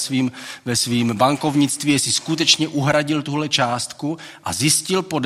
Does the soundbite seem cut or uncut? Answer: uncut